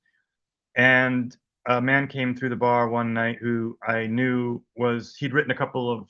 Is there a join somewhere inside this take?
no; 0 cuts

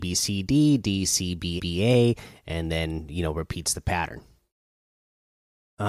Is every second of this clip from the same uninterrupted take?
no; 1 cut; at 1.6 s

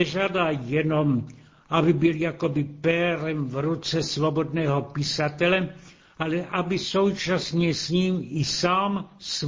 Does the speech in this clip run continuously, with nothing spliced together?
yes; 0 cuts

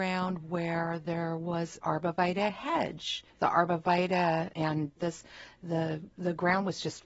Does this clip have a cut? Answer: yes; 4 cuts; at 1.8 s, 3.3 s, 4.5 s, 5.0 s

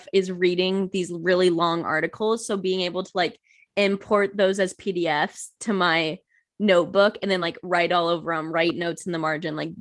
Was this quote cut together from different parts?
no; 0 cuts

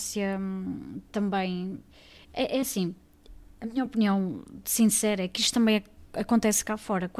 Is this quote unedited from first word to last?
yes; 0 cuts

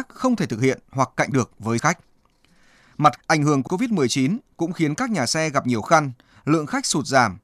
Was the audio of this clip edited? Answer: yes; 5 cuts; at 1.3 s, 1.8 s, 3.2 s, 3.7 s, 5.8 s

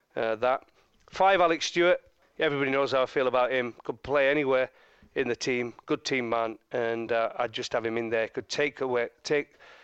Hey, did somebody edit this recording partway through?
no; 0 cuts

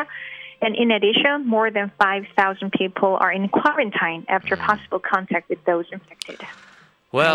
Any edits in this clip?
no; 0 cuts

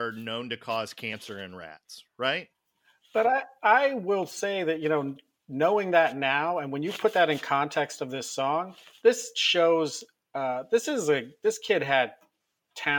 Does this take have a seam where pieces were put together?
yes; 1 cut; at 9.0 s

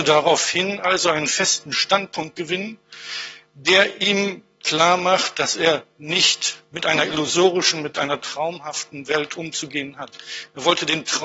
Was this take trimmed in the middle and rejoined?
no; 0 cuts

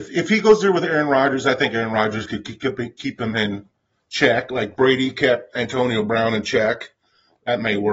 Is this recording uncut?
yes; 0 cuts

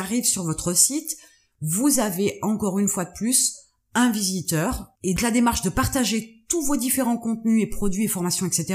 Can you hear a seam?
yes; 1 cut; at 5.2 s

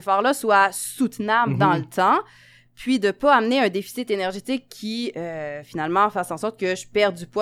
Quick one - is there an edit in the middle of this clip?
no; 0 cuts

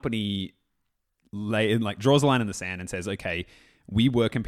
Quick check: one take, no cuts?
yes; 0 cuts

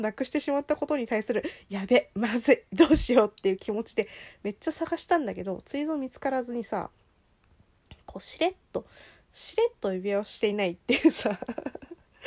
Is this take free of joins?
yes; 0 cuts

